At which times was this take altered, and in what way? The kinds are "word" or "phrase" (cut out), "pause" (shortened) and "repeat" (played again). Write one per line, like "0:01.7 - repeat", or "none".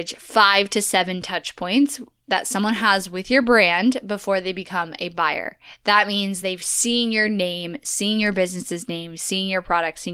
none

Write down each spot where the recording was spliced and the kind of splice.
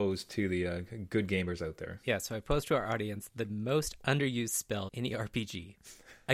0:04.9 - word

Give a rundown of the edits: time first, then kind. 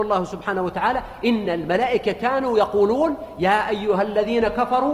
none

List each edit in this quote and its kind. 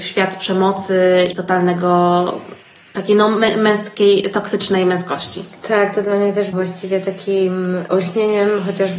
0:01.3 - word
0:06.5 - word

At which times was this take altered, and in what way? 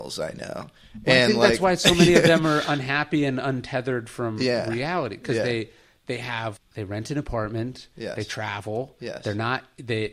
0:06.6 - word

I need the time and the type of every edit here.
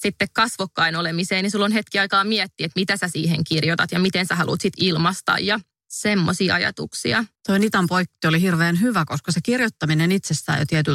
0:07.4 - pause

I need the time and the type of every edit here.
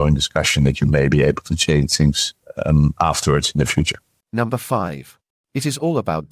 none

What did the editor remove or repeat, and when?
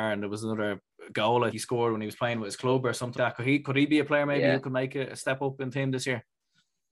0:01.5 - word
0:03.2 - word
0:05.7 - phrase

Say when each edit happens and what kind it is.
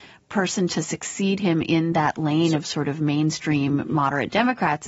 none

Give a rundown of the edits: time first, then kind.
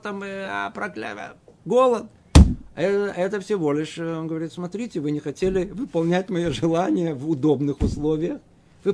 none

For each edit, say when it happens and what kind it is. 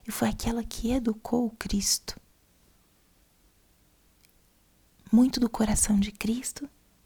none

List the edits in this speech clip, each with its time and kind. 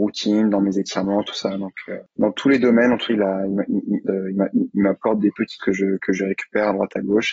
0:03.1 - word
0:04.1 - word
0:05.6 - word

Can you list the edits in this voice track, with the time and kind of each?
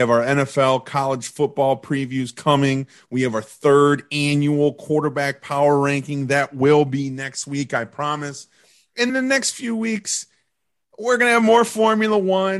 0:09.1 - word

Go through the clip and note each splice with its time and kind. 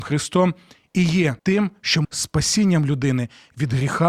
0:01.4 - pause
0:02.0 - word

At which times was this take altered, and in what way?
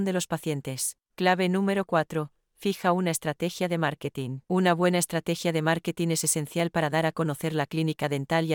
0:01.0 - pause
0:04.4 - pause

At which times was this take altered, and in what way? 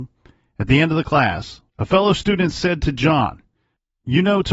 0:01.7 - pause

